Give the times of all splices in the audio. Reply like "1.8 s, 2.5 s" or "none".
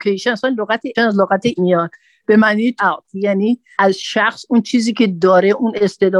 0.9 s, 1.6 s, 2.8 s